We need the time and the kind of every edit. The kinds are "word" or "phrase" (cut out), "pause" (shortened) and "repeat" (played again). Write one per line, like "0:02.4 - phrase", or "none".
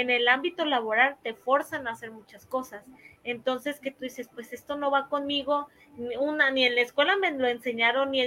none